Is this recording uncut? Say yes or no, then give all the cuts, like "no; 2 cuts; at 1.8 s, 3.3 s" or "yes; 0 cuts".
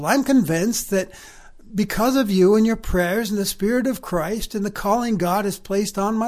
yes; 0 cuts